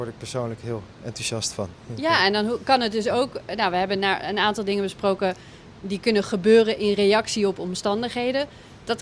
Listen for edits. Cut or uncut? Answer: uncut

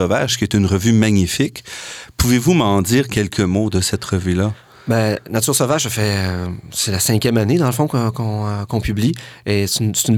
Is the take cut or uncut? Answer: uncut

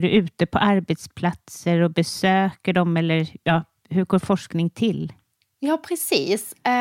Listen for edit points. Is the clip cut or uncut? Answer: uncut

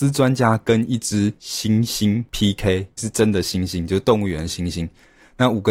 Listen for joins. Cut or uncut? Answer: cut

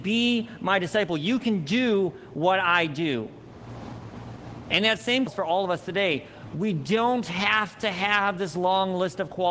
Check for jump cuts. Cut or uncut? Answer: cut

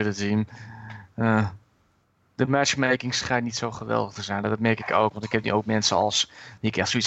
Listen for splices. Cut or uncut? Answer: uncut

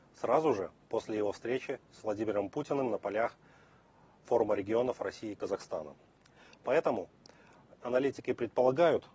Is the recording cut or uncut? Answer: uncut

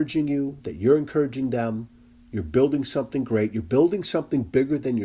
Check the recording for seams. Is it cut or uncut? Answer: uncut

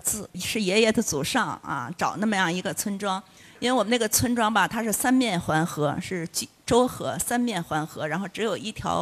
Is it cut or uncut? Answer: uncut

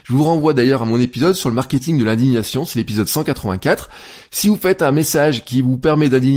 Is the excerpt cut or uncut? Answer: uncut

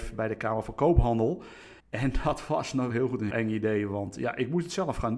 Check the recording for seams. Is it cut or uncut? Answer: cut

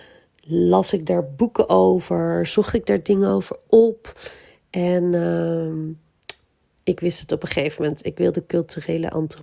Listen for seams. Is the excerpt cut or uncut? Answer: uncut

